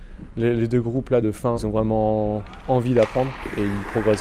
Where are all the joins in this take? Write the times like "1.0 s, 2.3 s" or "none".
1.2 s, 1.5 s